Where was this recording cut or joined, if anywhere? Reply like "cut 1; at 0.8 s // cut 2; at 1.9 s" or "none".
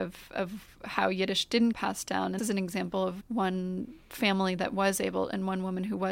cut 1; at 1.7 s // cut 2; at 2.4 s // cut 3; at 3.2 s